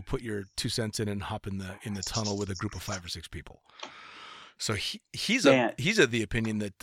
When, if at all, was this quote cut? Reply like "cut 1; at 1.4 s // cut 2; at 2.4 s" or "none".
none